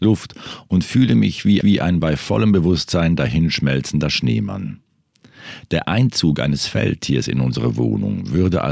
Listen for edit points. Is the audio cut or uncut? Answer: cut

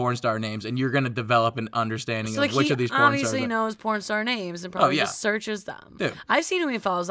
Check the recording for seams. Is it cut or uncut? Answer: uncut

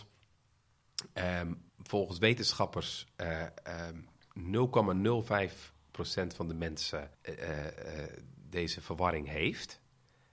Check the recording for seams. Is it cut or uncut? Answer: cut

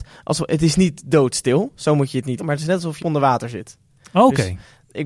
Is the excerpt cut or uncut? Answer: cut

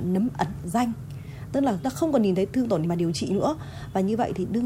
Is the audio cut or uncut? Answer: cut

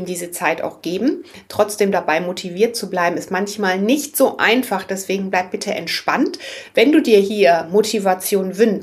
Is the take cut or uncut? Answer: uncut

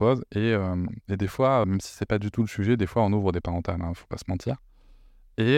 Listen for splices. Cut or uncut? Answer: cut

